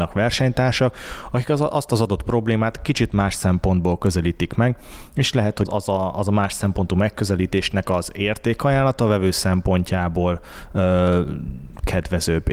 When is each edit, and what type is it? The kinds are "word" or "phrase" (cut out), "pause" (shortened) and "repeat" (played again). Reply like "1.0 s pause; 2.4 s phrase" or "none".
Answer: 5.6 s word